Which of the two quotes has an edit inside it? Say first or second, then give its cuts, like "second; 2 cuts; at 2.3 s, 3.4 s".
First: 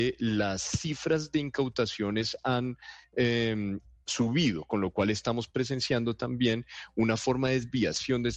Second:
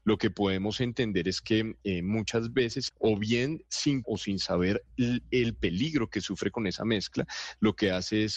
second; 2 cuts; at 2.9 s, 4.0 s